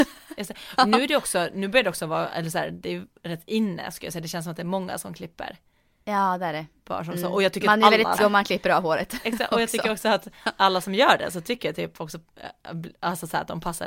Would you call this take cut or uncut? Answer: cut